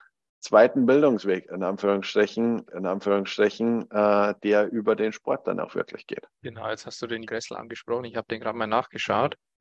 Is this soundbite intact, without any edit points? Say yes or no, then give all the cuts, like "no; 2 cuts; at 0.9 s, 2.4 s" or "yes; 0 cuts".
no; 3 cuts; at 2.7 s, 6.3 s, 7.3 s